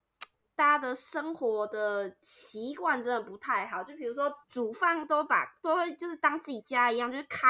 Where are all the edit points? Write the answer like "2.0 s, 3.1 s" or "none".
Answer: 4.4 s